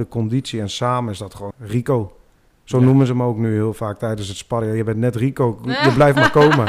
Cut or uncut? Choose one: cut